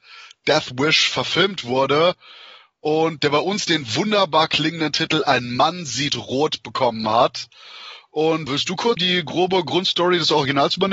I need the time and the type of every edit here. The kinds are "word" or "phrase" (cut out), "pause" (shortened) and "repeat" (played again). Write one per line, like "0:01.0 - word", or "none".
0:08.5 - word
0:09.0 - word

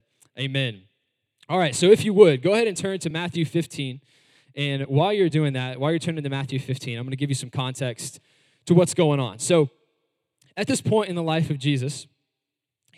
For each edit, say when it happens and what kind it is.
none

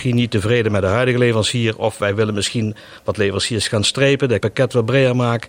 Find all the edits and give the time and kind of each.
0:04.4 - word

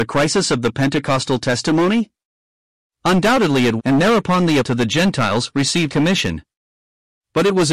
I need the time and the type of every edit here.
0:03.8 - word
0:04.6 - word
0:05.9 - word

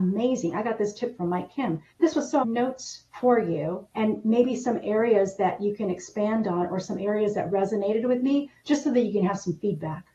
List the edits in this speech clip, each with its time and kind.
0:01.9 - pause
0:02.4 - phrase
0:03.1 - pause
0:03.9 - pause
0:07.5 - word
0:08.6 - pause

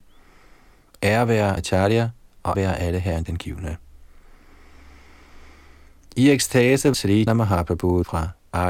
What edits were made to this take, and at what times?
0:01.6 - word
0:02.5 - word
0:03.3 - word
0:06.9 - word
0:07.3 - word

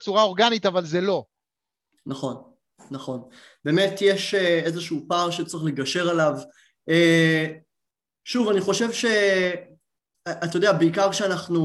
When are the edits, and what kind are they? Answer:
none

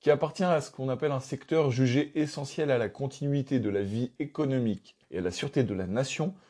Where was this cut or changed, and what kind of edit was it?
0:05.0 - pause

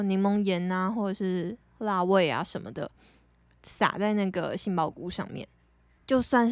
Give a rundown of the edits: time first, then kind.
none

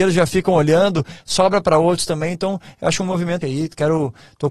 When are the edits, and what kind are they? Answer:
0:03.4 - word

